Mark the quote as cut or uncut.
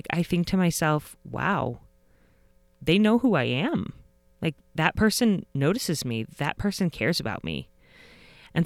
uncut